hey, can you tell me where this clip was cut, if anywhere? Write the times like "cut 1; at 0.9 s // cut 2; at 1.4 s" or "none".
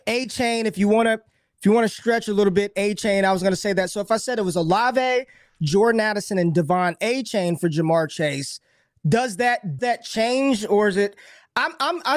cut 1; at 9.8 s